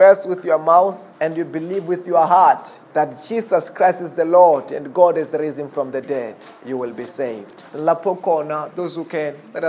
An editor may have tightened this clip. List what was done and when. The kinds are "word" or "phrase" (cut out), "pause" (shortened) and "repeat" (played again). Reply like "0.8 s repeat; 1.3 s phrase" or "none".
1.1 s pause; 2.8 s pause; 7.7 s pause